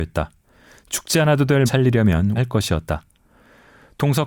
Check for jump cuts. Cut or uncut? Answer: cut